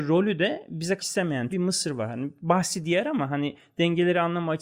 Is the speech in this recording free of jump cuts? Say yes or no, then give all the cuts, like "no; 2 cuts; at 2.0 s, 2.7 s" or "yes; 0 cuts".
no; 2 cuts; at 1.0 s, 1.5 s